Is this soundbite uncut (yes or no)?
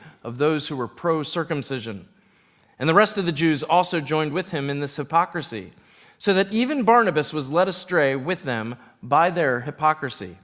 yes